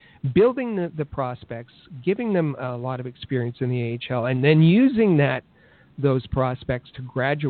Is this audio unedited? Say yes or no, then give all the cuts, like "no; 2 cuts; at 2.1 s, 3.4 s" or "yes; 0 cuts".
yes; 0 cuts